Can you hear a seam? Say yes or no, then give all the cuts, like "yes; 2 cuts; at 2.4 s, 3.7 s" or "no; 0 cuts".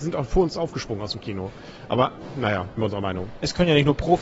yes; 1 cut; at 2.8 s